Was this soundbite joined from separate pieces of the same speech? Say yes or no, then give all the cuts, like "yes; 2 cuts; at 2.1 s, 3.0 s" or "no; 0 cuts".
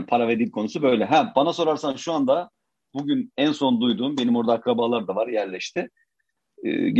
no; 0 cuts